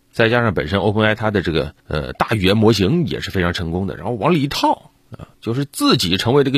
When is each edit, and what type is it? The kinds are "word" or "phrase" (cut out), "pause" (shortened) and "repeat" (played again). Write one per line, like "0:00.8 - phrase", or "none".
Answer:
0:01.8 - pause
0:05.3 - pause